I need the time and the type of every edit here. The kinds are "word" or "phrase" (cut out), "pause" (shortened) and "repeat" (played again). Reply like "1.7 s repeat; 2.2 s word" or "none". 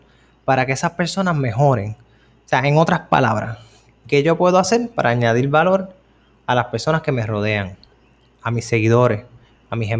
none